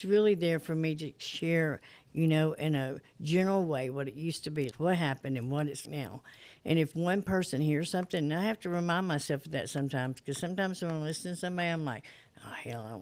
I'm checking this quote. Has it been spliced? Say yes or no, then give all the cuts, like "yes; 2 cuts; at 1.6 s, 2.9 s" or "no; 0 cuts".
yes; 3 cuts; at 4.7 s, 5.8 s, 6.9 s